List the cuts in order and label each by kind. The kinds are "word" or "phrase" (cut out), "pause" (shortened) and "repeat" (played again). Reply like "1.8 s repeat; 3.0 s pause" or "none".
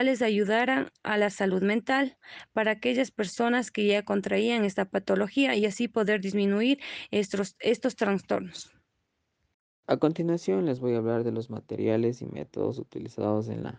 none